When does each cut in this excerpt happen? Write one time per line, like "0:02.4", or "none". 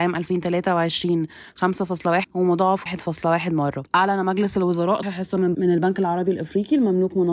0:02.2
0:02.9
0:03.9
0:05.0
0:05.5